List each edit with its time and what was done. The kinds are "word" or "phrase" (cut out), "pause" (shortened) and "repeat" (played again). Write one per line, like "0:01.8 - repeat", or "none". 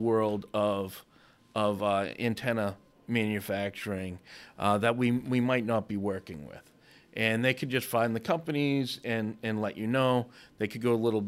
none